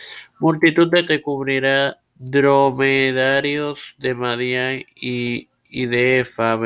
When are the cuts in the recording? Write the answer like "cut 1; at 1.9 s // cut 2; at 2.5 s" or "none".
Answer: cut 1; at 1.1 s // cut 2; at 2.1 s